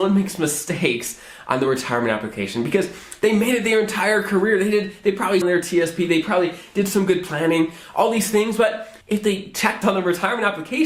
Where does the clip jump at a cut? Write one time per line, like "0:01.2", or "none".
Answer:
0:05.4
0:09.0
0:09.8